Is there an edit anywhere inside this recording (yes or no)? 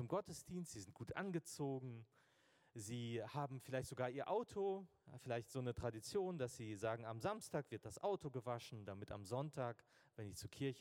no